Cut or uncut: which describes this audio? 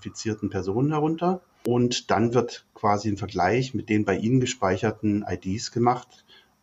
uncut